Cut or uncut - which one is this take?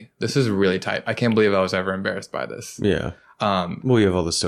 uncut